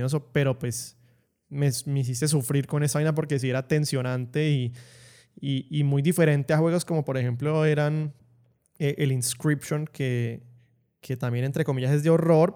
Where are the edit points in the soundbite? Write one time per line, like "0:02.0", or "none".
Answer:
none